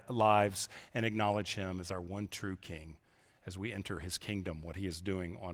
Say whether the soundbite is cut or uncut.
uncut